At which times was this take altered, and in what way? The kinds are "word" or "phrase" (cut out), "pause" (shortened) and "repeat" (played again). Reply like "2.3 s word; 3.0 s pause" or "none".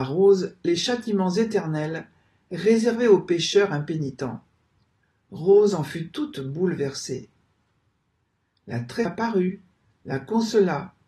9.1 s phrase